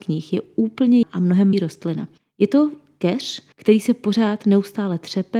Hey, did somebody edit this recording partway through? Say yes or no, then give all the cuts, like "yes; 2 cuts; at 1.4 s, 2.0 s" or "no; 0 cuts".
yes; 4 cuts; at 1.0 s, 1.5 s, 2.2 s, 3.5 s